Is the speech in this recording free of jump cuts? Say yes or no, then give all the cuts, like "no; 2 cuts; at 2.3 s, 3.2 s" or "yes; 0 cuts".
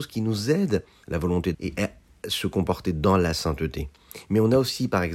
no; 2 cuts; at 1.0 s, 1.5 s